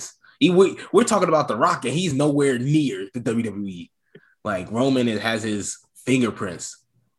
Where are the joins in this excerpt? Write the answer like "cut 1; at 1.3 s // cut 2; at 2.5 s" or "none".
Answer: none